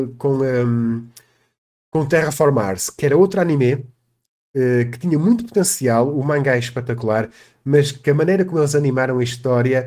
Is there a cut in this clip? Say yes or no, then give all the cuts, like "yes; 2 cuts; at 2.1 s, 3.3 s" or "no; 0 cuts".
no; 0 cuts